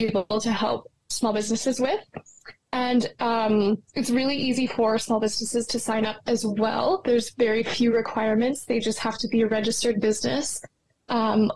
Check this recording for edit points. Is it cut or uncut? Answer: cut